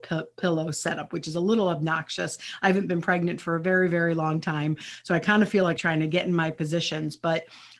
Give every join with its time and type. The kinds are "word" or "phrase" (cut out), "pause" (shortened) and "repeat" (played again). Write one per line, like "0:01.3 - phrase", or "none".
0:05.8 - phrase